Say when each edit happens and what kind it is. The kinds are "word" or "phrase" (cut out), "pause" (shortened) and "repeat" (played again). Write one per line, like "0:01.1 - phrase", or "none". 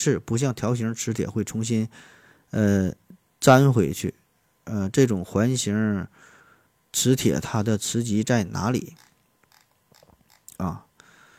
none